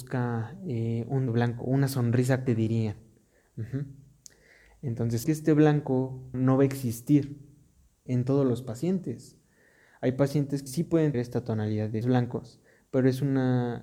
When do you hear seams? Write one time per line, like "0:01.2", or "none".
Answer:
0:01.3
0:02.5
0:05.2
0:06.3
0:08.1
0:10.7
0:11.1
0:12.0